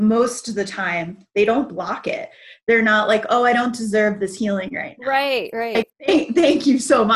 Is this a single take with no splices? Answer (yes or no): yes